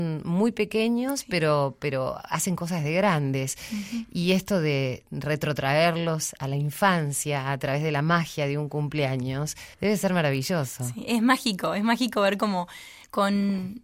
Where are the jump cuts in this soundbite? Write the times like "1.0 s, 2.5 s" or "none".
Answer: 9.7 s